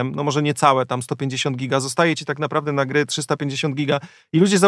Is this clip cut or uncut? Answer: uncut